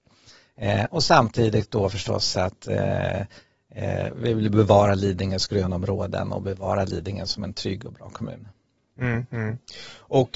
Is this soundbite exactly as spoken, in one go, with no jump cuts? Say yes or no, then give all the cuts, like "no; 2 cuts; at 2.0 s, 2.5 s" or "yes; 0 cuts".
yes; 0 cuts